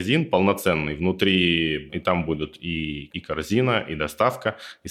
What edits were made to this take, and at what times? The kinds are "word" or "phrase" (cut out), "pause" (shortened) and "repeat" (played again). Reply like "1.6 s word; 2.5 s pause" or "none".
1.9 s word; 3.1 s word